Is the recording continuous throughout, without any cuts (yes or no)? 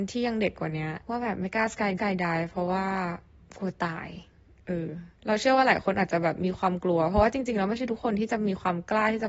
no